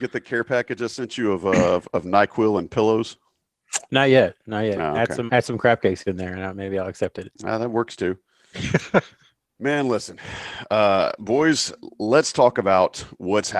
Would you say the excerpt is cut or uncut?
cut